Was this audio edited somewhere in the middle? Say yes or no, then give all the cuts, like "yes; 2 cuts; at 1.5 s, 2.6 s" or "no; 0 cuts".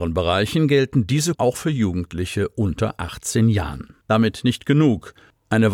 yes; 2 cuts; at 1.3 s, 4.0 s